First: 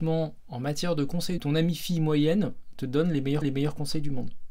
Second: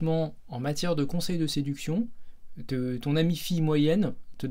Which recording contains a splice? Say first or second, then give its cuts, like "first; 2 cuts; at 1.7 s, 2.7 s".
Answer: first; 2 cuts; at 1.4 s, 3.4 s